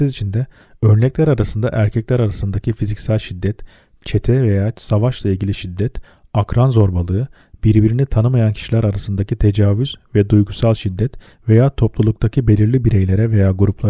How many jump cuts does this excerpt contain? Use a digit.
0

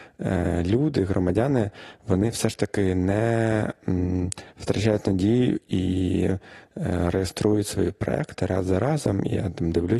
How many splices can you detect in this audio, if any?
0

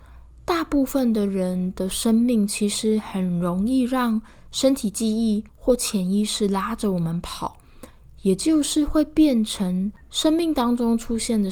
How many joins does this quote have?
2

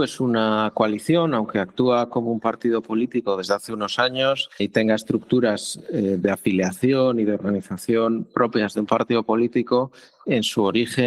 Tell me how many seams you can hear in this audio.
1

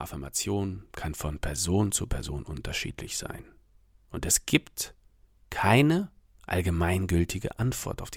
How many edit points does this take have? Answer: 0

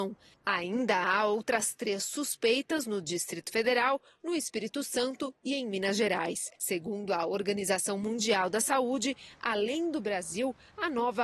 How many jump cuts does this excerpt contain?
1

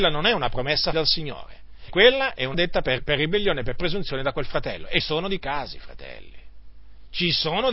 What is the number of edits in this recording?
6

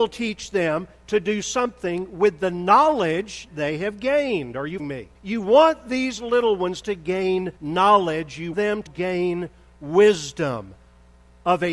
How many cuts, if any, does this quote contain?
7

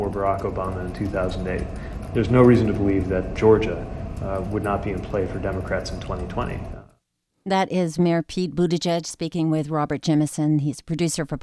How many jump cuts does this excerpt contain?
1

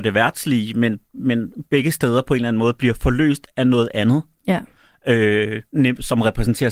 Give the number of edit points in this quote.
0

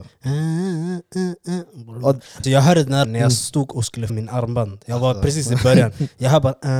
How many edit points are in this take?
3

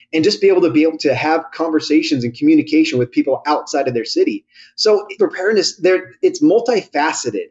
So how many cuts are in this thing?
2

